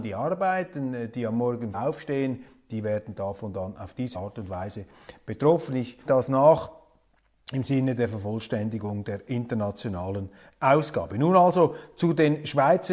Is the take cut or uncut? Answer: cut